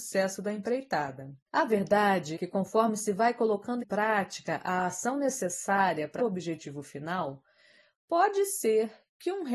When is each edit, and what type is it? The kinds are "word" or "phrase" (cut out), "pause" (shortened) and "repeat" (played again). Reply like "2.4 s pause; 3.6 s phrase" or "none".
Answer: 1.5 s pause; 2.3 s word; 3.8 s word; 6.2 s word